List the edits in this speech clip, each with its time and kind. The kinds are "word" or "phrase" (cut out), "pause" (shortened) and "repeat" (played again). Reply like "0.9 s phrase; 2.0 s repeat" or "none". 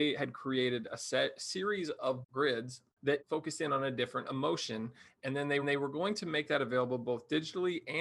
3.2 s word; 5.6 s repeat

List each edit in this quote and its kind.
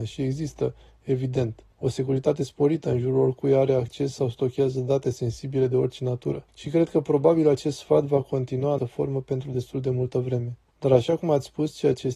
1.7 s pause; 6.5 s pause; 8.8 s word; 10.7 s pause

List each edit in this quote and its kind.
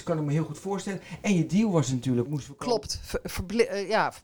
2.3 s phrase

